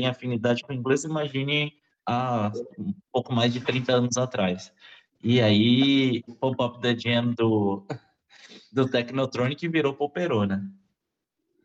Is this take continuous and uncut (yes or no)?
no